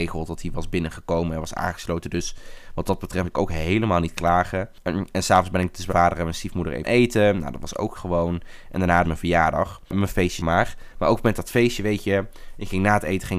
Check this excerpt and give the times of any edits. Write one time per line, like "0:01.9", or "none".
0:03.2
0:05.9
0:06.8
0:08.0
0:09.0
0:10.4